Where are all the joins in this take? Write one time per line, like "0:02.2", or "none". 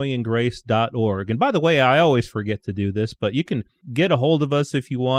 none